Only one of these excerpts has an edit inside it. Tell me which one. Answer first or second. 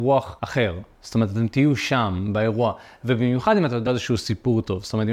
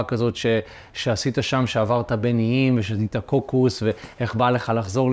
first